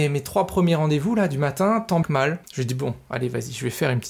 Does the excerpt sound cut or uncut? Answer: cut